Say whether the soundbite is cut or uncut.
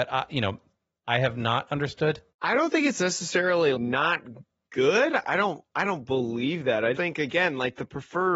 cut